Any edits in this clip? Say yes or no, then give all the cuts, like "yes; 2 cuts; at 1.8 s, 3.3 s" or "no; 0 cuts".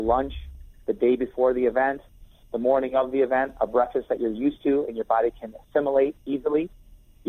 no; 0 cuts